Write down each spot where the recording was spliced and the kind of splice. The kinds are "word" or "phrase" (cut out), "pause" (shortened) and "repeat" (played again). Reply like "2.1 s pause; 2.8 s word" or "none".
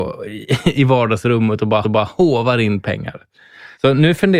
1.8 s repeat